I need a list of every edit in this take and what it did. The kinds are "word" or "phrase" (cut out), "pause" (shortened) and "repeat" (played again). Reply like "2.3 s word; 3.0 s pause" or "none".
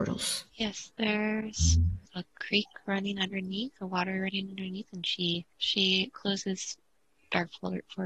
2.1 s pause; 3.8 s pause; 5.5 s pause